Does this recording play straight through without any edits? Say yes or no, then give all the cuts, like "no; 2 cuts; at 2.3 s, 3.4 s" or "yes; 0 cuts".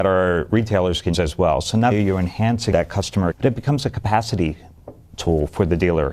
no; 4 cuts; at 1.1 s, 1.9 s, 2.7 s, 3.3 s